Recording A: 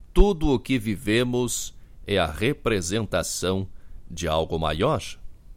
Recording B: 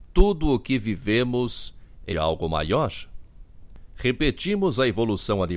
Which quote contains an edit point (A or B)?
B